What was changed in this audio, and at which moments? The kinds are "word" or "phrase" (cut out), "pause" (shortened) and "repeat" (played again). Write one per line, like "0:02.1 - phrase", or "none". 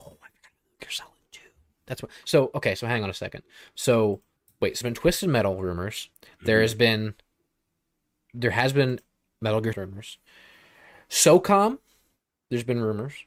0:04.4 - pause
0:04.8 - word
0:06.1 - pause
0:09.7 - word